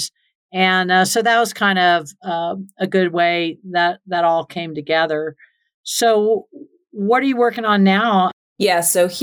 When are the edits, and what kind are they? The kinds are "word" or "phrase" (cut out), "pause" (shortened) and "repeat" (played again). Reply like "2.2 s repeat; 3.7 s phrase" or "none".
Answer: none